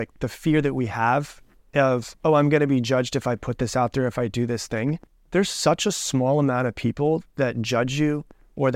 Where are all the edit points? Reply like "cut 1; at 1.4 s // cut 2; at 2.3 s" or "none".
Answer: cut 1; at 5.1 s